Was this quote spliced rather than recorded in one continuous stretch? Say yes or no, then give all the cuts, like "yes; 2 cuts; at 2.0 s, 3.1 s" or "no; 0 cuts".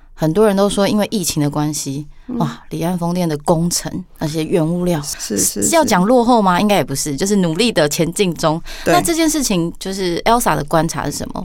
yes; 1 cut; at 5.1 s